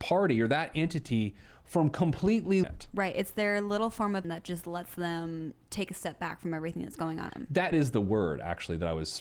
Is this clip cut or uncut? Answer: cut